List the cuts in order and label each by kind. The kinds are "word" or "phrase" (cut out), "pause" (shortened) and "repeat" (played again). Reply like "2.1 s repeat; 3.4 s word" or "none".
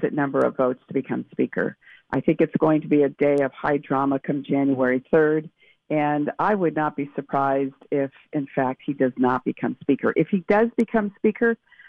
none